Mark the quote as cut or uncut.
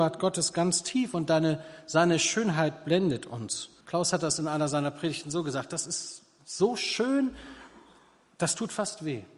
cut